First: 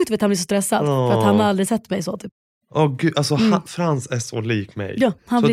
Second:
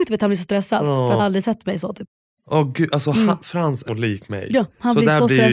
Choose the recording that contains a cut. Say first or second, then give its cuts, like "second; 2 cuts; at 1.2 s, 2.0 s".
second; 2 cuts; at 1.2 s, 3.9 s